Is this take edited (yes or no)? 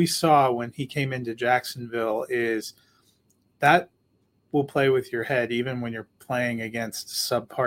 no